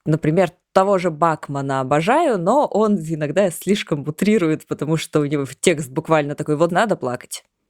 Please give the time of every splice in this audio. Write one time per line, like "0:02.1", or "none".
0:06.7